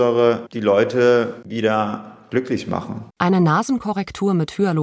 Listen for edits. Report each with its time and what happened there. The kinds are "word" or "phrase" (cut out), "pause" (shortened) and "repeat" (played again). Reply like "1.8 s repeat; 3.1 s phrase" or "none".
3.1 s pause